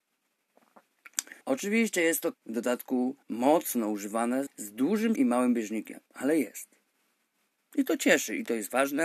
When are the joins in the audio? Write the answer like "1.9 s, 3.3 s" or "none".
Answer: 1.4 s, 2.3 s, 3.2 s, 4.5 s, 5.2 s, 6.1 s